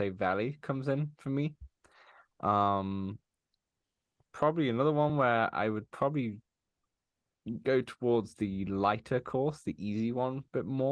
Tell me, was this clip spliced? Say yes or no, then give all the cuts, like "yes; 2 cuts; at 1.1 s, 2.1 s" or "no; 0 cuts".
no; 0 cuts